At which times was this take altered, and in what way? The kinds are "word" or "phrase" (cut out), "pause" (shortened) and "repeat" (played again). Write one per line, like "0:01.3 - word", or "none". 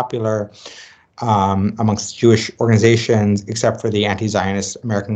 none